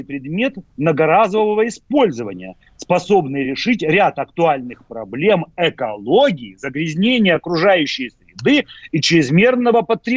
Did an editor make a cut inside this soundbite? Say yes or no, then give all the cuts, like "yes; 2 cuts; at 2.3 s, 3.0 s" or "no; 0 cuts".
no; 0 cuts